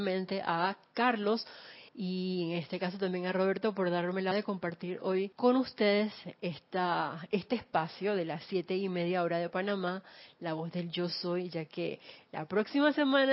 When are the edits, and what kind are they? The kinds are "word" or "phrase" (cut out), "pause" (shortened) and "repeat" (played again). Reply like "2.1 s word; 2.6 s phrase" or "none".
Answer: 1.9 s pause; 4.3 s word; 5.3 s pause